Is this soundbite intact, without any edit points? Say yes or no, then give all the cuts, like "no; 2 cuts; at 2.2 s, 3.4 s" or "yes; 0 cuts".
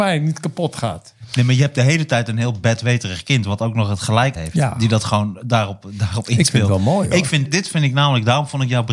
no; 2 cuts; at 4.4 s, 7.4 s